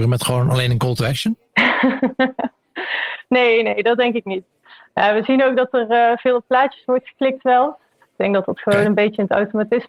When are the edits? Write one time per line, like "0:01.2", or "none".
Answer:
none

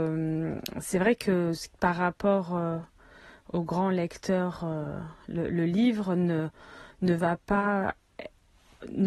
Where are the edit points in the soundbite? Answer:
0:01.7

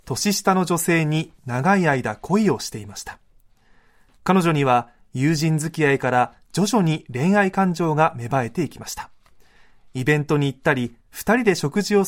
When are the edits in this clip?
0:11.0

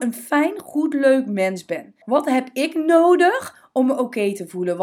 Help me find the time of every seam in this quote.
0:02.0

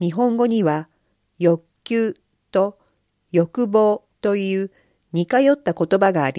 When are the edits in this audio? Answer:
0:04.1

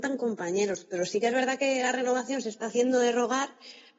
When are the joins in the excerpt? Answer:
none

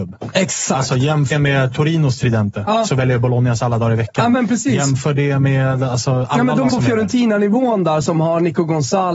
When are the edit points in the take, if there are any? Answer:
0:01.3
0:06.7

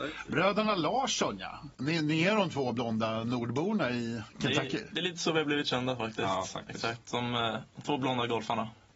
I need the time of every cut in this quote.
0:01.7

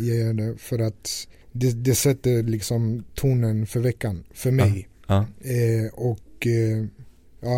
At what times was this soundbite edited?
0:01.4

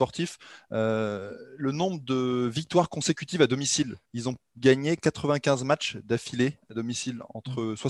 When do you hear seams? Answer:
0:04.0

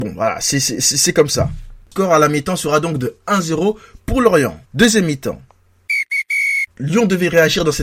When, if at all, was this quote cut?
0:01.8
0:04.6
0:06.7

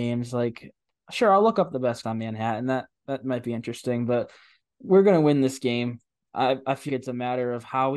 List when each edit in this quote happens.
0:02.0
0:06.9

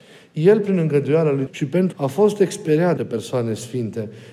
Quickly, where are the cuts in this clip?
0:01.5
0:01.9
0:03.0

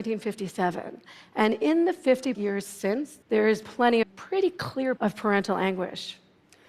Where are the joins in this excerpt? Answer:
0:02.3
0:03.2
0:03.6
0:04.0
0:05.0

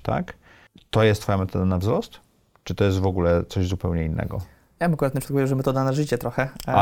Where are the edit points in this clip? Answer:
none

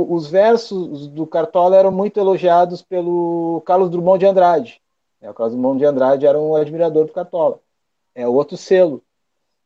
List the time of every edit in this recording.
none

